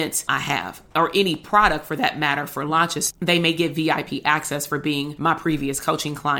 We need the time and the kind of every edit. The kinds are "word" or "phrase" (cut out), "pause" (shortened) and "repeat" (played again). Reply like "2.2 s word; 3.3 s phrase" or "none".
3.1 s word

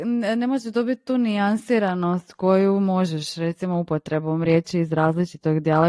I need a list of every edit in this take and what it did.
none

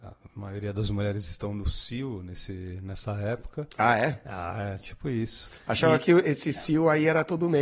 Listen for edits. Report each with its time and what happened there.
none

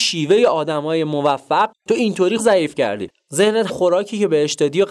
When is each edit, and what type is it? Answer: 1.7 s word; 2.4 s word; 3.7 s word

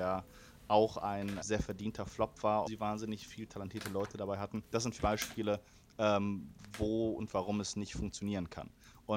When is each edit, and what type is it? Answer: 1.4 s word; 2.7 s word; 4.7 s pause; 5.0 s word

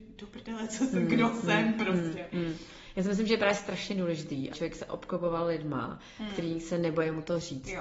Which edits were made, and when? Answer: 4.5 s word

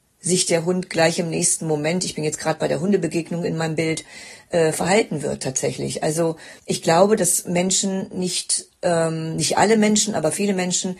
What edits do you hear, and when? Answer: 6.6 s pause

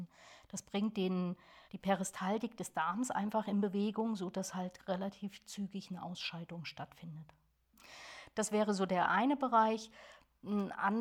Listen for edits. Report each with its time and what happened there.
1.7 s pause

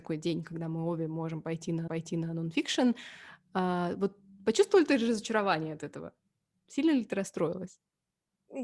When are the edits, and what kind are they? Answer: 1.9 s repeat

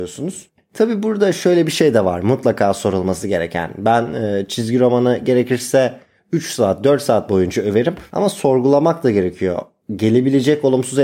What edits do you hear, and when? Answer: none

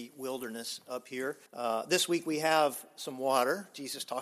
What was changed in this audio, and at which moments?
1.5 s pause

